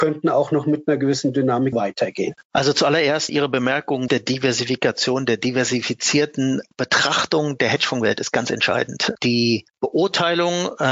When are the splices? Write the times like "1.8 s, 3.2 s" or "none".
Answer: 1.7 s, 2.4 s, 3.3 s, 4.1 s, 6.7 s, 9.7 s